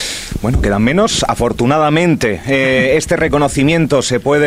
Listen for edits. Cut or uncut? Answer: uncut